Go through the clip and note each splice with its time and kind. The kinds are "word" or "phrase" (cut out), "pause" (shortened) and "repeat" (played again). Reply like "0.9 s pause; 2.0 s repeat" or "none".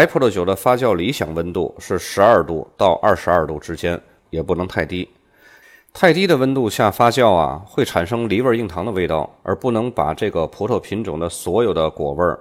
4.2 s phrase; 9.4 s pause

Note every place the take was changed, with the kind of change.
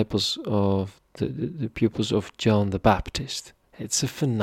none

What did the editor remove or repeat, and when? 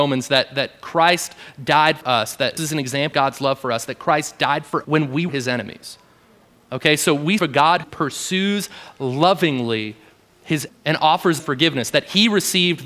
2.0 s word; 2.6 s word; 3.1 s word; 4.8 s word; 5.3 s word; 7.4 s word; 7.8 s word; 10.7 s word; 11.4 s word

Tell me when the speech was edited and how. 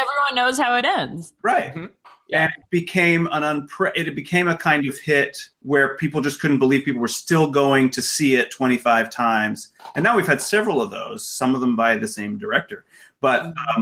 5.5 s pause

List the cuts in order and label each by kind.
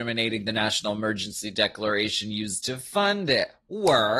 none

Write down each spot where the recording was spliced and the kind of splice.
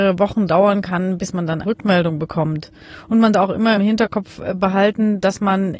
1.6 s word; 3.3 s word; 3.8 s word

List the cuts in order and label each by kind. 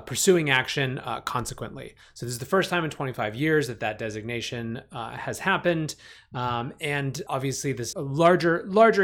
7.3 s word; 7.9 s phrase

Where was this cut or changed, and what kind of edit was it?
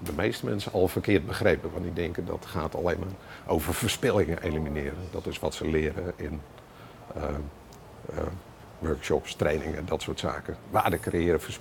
none

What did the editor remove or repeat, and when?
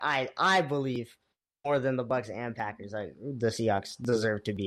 none

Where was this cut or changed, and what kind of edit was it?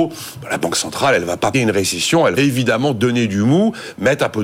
1.5 s word; 2.4 s word

